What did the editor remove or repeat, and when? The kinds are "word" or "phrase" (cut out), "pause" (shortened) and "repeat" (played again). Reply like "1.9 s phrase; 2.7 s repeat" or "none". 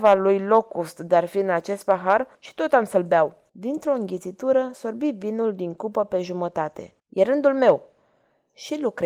2.3 s pause; 3.5 s pause; 7.0 s pause

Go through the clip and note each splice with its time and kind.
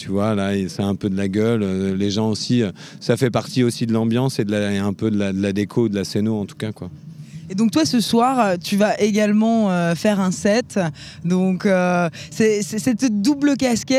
none

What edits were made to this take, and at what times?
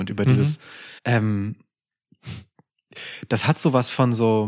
1.0 s pause

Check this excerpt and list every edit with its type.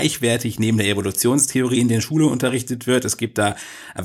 none

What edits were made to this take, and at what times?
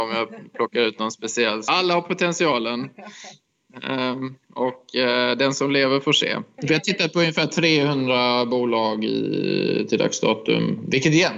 1.7 s phrase; 4.4 s pause

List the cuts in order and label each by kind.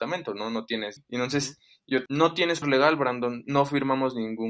1.0 s word; 2.1 s word; 2.6 s word

